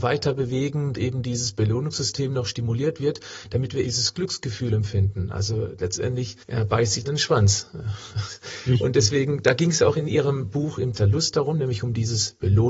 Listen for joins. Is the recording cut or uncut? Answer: cut